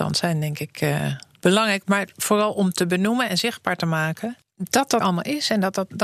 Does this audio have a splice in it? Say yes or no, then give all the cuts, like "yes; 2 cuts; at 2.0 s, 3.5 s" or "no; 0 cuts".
yes; 2 cuts; at 1.4 s, 5.0 s